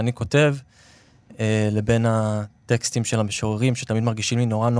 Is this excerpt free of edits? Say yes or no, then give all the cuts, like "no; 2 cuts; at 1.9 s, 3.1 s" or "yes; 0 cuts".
yes; 0 cuts